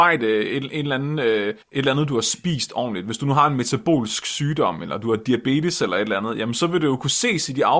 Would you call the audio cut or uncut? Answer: cut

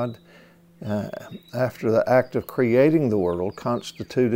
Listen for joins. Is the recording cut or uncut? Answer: uncut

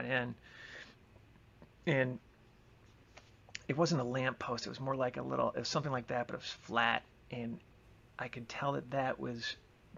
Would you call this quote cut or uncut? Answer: uncut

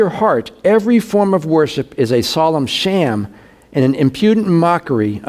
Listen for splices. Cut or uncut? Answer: uncut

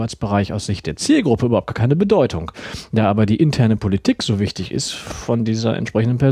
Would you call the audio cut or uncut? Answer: uncut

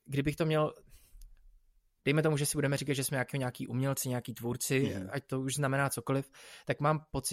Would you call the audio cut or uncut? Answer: uncut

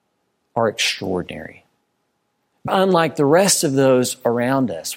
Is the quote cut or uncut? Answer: cut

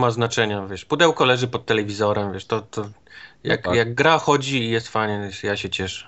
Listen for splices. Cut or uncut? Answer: uncut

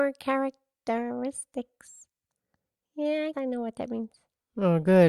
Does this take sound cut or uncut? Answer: cut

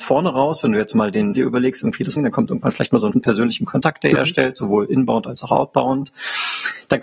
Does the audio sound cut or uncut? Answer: cut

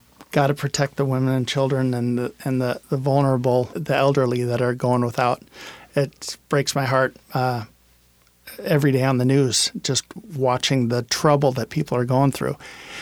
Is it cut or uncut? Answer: cut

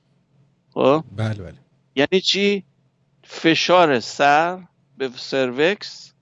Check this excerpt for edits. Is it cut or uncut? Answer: uncut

